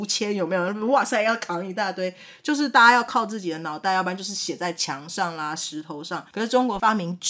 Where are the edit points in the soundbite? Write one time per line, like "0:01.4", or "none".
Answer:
none